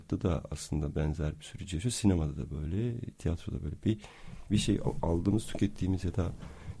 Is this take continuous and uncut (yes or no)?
yes